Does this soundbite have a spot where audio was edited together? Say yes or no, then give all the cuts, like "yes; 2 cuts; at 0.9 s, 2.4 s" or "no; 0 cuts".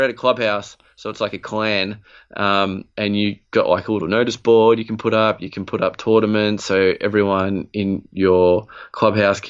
no; 0 cuts